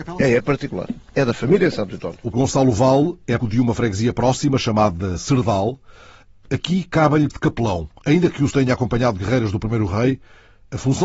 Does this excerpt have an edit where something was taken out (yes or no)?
yes